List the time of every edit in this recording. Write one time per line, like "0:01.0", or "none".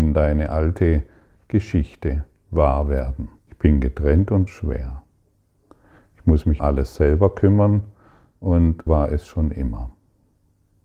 0:03.4
0:04.5
0:06.6
0:08.9

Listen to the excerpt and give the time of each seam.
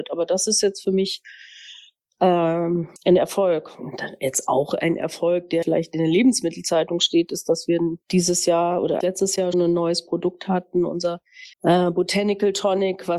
0:03.0
0:05.6
0:08.0
0:09.0
0:09.5
0:11.5

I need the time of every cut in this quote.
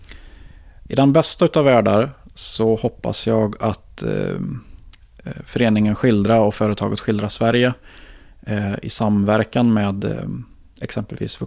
none

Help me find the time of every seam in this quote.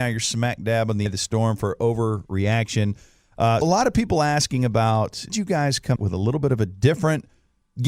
0:01.1
0:03.6
0:05.3
0:06.0

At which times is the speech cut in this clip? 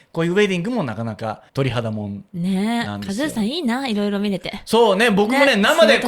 0:01.5
0:02.3

